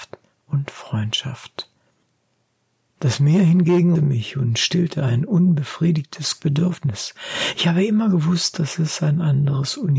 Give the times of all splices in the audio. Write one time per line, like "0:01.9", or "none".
0:02.0
0:03.9
0:06.4